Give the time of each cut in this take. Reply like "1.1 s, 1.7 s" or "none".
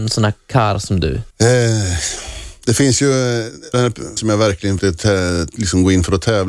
1.3 s, 3.7 s, 4.2 s, 4.8 s